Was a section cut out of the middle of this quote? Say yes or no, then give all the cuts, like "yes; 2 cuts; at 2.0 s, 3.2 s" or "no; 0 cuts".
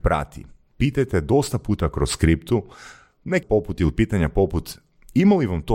yes; 1 cut; at 3.4 s